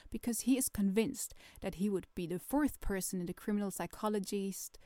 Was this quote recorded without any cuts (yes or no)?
yes